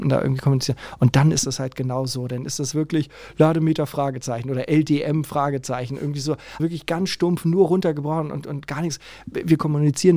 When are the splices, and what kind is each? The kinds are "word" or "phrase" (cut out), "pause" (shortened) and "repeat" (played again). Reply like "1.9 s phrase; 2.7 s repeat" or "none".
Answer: 2.7 s word; 6.6 s word